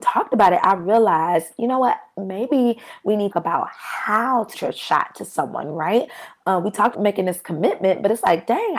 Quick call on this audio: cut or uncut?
cut